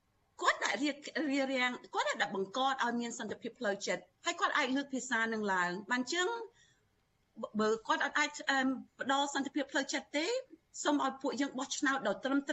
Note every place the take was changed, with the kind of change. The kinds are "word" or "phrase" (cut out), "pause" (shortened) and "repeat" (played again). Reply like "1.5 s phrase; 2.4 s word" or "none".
4.1 s pause